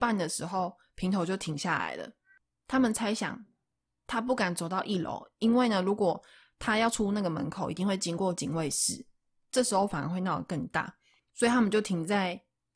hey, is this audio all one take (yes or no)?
yes